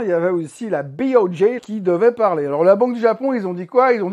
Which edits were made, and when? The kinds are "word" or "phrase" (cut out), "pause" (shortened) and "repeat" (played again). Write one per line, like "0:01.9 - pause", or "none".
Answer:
0:01.6 - phrase